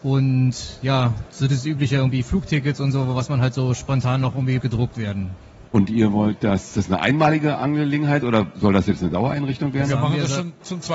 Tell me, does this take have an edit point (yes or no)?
yes